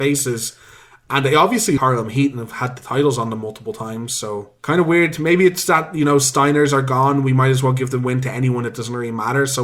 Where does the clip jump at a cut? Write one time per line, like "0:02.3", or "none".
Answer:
0:01.8